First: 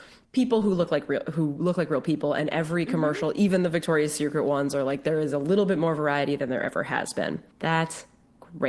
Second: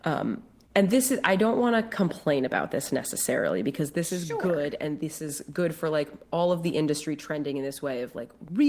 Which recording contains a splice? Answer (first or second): first